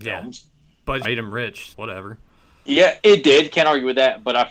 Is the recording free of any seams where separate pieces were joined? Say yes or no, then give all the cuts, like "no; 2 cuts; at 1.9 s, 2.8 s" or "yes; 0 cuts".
no; 3 cuts; at 1.0 s, 1.7 s, 3.0 s